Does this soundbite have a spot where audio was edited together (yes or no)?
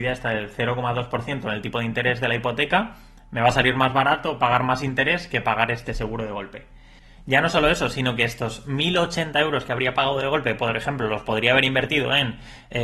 no